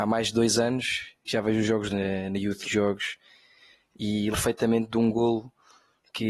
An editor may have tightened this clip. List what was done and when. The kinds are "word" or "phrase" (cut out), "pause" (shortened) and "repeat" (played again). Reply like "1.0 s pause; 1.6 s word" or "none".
1.2 s word; 1.9 s phrase; 2.6 s phrase; 4.3 s word